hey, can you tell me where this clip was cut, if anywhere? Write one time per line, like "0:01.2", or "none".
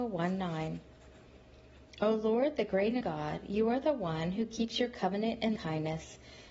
0:03.0
0:05.6